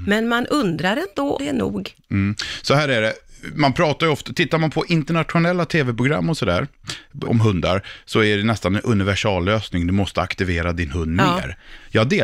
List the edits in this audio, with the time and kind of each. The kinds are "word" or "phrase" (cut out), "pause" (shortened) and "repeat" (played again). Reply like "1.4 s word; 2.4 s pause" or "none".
1.4 s word; 7.2 s word